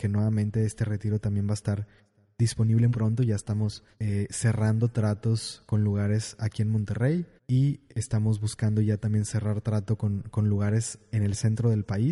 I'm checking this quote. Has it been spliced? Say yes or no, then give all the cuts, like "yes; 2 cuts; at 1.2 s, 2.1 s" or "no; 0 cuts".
yes; 3 cuts; at 2.9 s, 3.9 s, 7.4 s